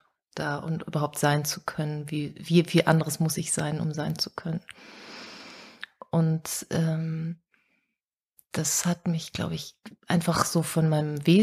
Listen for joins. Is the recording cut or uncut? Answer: uncut